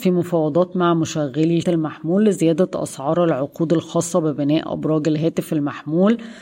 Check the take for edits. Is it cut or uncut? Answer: cut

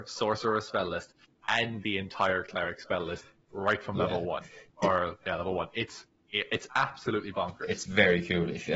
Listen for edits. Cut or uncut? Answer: uncut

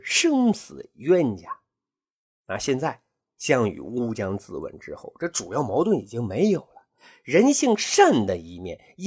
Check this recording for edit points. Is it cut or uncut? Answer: uncut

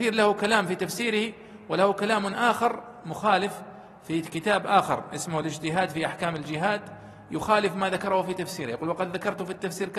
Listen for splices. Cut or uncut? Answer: uncut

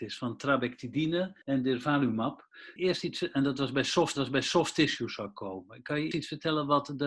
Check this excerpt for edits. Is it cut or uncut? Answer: cut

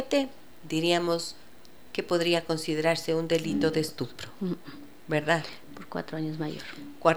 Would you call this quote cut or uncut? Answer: uncut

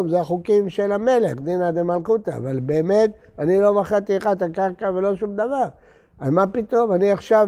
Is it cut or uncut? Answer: uncut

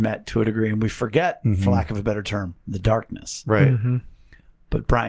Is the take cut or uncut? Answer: cut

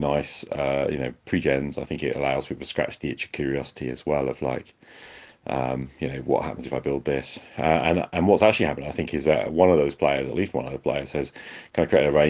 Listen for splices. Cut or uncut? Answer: uncut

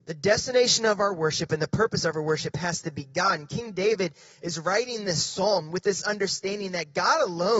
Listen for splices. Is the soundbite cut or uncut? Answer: uncut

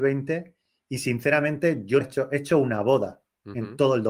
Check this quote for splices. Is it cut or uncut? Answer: cut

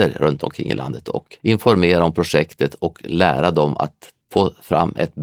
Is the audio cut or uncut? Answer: cut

